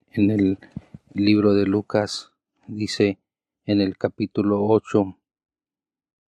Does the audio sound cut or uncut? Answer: uncut